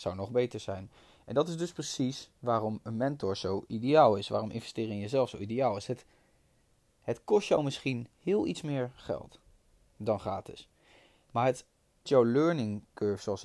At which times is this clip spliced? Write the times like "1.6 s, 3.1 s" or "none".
12.1 s